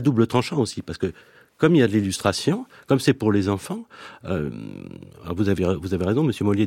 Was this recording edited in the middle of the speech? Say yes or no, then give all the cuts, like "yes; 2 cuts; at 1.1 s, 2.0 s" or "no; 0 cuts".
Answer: no; 0 cuts